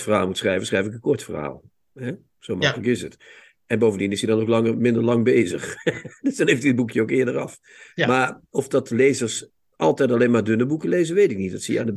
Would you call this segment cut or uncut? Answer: uncut